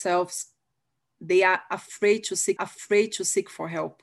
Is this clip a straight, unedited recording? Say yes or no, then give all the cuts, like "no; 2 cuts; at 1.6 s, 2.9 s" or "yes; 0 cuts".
no; 1 cut; at 2.6 s